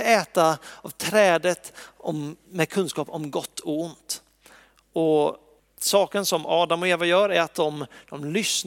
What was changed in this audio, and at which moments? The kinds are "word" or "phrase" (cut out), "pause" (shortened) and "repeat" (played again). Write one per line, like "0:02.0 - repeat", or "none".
0:05.6 - pause